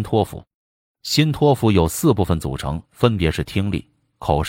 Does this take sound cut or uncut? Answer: cut